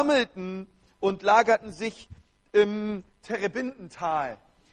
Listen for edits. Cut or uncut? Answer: uncut